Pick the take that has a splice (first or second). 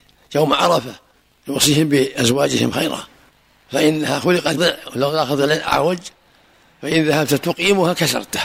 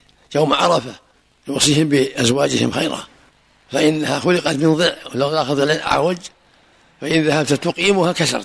first